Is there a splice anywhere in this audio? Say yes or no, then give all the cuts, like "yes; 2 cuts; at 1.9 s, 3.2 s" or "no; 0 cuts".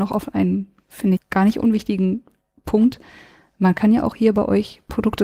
yes; 1 cut; at 1.2 s